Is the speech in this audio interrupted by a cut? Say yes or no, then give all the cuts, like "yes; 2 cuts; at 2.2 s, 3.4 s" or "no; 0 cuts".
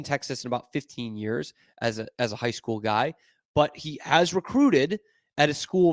no; 0 cuts